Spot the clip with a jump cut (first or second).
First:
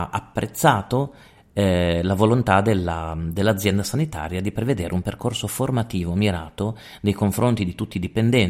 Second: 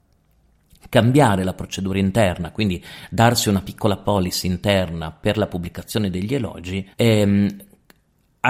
second